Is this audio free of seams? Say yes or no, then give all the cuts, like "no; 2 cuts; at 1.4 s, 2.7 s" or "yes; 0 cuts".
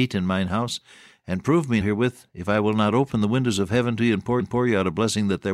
no; 2 cuts; at 1.8 s, 4.4 s